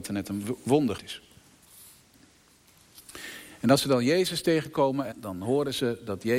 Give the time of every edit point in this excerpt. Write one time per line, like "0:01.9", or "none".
0:01.0
0:05.1